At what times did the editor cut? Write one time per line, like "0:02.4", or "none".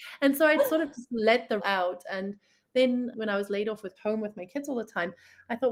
0:01.6
0:03.1
0:04.0